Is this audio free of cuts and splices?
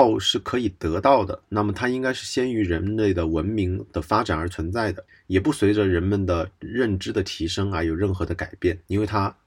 no; 1 cut; at 5.1 s

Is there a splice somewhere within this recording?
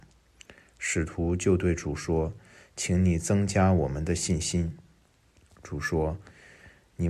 no; 0 cuts

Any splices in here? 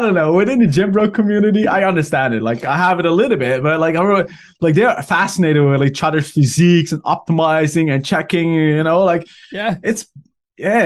no; 0 cuts

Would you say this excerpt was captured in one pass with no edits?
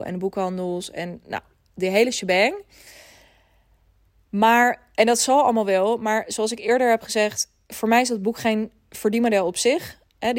yes; 0 cuts

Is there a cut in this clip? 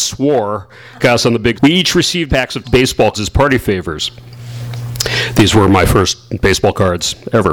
yes; 5 cuts; at 1.0 s, 1.5 s, 2.3 s, 2.6 s, 3.1 s

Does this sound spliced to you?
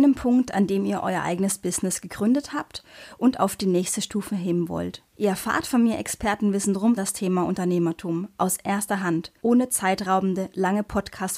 yes; 3 cuts; at 5.1 s, 7.0 s, 9.4 s

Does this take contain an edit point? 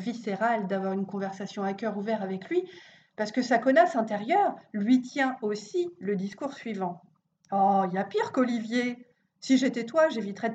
no; 0 cuts

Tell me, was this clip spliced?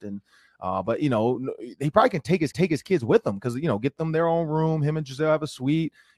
yes; 1 cut; at 2.5 s

